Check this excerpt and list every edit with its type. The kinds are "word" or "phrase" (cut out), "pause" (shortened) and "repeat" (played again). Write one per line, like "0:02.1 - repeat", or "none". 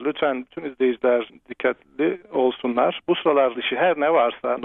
0:01.3 - word
0:02.2 - word
0:03.6 - word

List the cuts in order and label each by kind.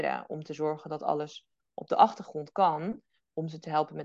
none

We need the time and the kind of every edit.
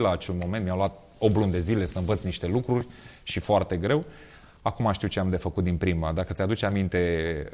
none

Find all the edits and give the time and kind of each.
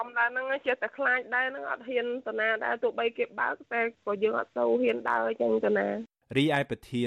none

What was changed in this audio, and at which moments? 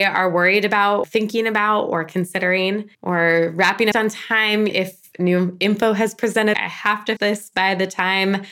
0:01.0 - word
0:02.9 - pause
0:03.9 - phrase
0:04.7 - word
0:06.5 - phrase
0:07.2 - word

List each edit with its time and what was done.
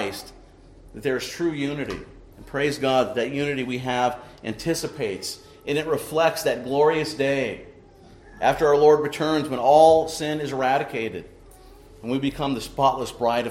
0:02.3 - pause

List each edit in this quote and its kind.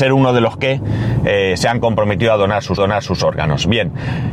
0:02.8 - repeat

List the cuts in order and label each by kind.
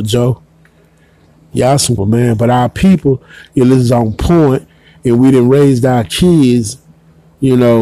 0:02.0 - phrase

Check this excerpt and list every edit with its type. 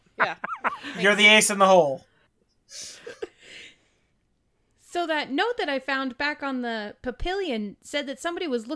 none

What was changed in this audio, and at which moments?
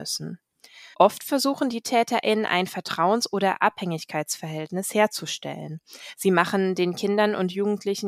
0:00.9 - pause

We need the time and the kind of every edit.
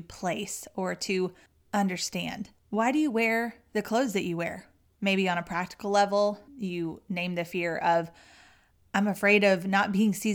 0:02.6 - pause
0:04.9 - pause
0:06.5 - pause

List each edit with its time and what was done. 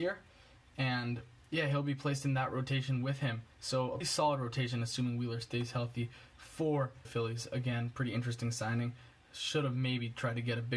0:01.4 - pause
0:03.5 - pause
0:04.0 - word
0:07.0 - phrase

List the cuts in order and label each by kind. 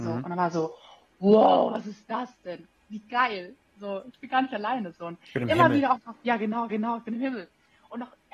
0:06.0 - word
0:06.7 - repeat

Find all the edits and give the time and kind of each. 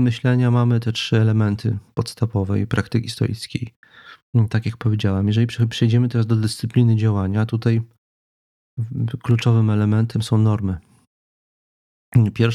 none

